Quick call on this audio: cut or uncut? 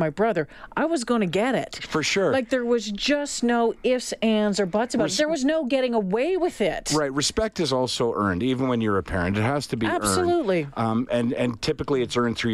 uncut